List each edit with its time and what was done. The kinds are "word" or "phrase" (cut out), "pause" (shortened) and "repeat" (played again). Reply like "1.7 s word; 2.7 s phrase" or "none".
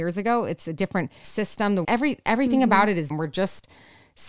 1.2 s word; 1.8 s word; 3.1 s word